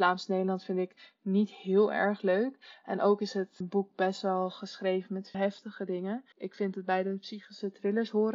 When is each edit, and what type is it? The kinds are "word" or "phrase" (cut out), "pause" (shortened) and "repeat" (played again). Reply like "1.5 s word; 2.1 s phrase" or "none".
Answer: 3.6 s word; 5.3 s word; 6.3 s pause